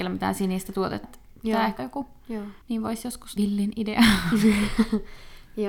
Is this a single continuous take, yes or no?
no